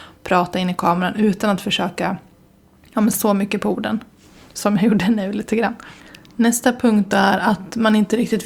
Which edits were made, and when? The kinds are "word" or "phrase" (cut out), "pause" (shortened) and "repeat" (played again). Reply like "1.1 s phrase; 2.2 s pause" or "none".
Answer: 3.1 s word